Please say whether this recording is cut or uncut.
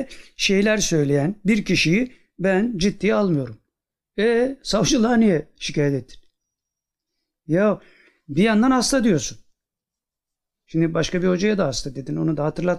uncut